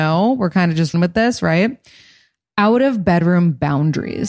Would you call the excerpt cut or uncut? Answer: cut